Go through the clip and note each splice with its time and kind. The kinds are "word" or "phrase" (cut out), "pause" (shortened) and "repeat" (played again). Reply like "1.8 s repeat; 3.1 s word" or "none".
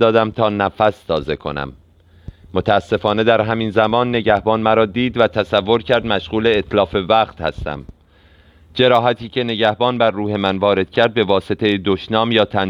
none